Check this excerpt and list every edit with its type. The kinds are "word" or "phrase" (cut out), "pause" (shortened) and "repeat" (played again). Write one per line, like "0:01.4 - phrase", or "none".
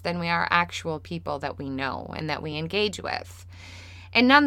none